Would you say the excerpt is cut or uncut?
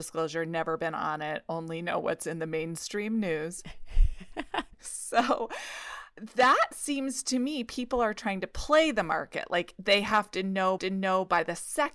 cut